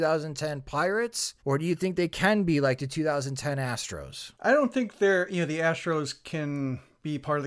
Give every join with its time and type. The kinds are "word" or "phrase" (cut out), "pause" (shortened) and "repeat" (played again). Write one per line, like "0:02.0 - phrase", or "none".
0:01.4 - pause
0:04.3 - pause